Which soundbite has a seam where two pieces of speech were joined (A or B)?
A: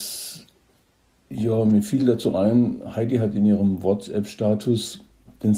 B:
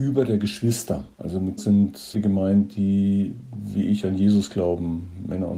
B